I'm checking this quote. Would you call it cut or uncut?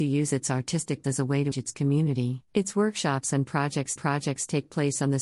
cut